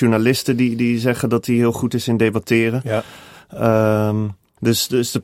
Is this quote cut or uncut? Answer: uncut